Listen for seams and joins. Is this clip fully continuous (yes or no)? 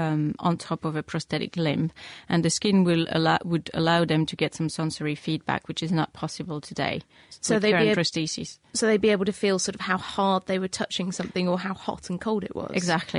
yes